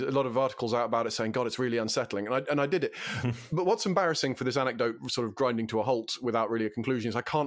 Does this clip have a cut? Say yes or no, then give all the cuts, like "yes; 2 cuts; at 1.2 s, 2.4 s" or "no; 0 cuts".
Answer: no; 0 cuts